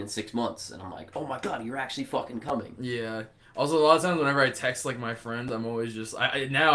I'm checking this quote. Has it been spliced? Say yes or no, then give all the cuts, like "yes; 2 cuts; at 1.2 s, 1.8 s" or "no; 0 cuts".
no; 0 cuts